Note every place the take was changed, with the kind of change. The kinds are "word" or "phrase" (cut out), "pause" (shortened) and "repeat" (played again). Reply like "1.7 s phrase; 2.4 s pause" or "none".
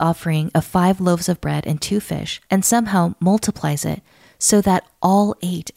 2.5 s pause